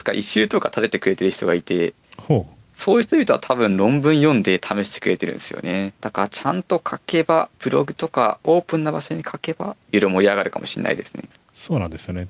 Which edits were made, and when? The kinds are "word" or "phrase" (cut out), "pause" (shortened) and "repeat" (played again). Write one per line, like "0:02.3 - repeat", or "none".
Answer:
0:06.0 - pause
0:07.6 - pause
0:09.8 - pause
0:11.3 - pause